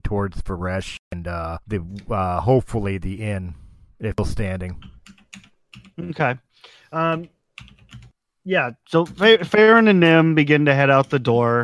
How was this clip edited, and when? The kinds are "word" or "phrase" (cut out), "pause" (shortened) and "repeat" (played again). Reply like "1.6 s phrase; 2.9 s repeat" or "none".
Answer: 1.6 s pause; 4.1 s word